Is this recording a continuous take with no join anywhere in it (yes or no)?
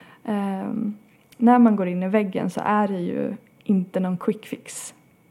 yes